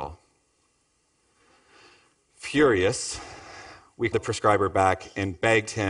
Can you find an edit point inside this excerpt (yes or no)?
yes